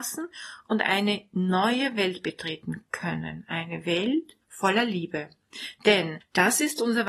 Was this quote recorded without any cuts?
no; 1 cut; at 4.4 s

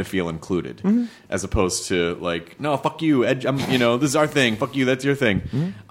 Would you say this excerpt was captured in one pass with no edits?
yes; 0 cuts

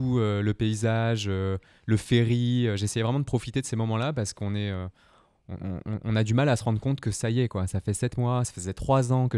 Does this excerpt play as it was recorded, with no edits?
yes; 0 cuts

